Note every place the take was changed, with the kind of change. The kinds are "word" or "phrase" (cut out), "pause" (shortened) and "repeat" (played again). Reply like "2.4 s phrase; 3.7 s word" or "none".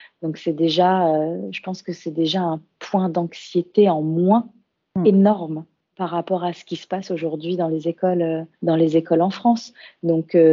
8.5 s pause